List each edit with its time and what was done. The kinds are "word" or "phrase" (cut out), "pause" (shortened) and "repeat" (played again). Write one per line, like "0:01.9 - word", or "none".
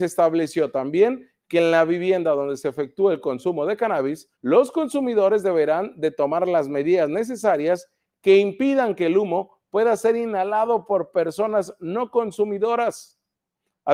0:04.3 - pause